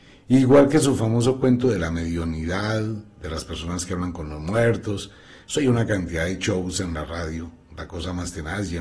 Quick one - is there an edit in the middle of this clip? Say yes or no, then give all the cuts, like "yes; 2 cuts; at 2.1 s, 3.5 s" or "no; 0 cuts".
no; 0 cuts